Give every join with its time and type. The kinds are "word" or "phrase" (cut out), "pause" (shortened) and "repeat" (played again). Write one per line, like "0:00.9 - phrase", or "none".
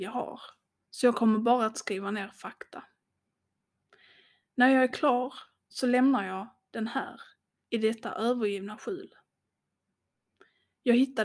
none